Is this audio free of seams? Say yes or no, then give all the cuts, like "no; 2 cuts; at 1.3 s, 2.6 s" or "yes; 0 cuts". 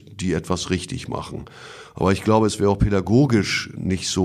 yes; 0 cuts